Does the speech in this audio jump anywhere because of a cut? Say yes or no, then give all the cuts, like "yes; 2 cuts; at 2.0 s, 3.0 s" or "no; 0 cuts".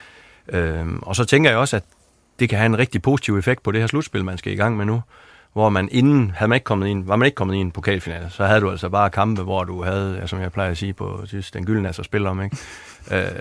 yes; 1 cut; at 11.9 s